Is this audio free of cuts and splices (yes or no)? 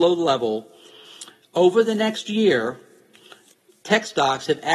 yes